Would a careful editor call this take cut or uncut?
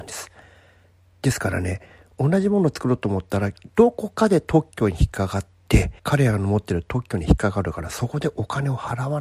cut